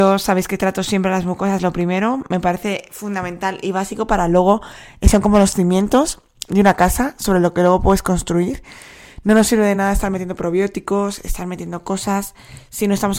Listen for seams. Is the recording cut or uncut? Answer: uncut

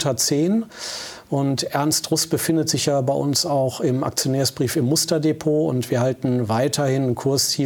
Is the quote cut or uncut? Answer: uncut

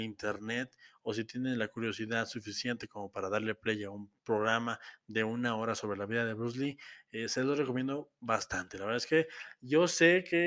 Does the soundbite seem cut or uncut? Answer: cut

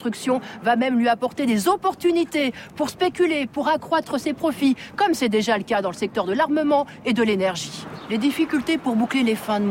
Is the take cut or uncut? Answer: uncut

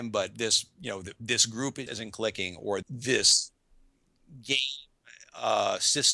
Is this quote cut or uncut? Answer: cut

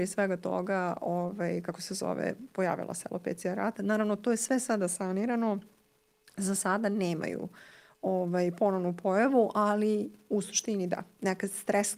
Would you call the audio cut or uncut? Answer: uncut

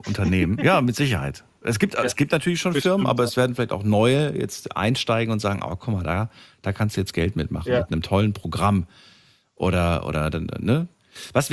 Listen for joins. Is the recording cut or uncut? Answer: uncut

